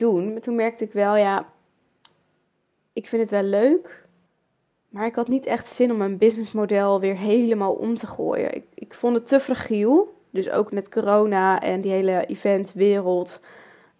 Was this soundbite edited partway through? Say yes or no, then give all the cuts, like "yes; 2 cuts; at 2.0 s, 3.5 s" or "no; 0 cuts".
yes; 2 cuts; at 4.3 s, 10.7 s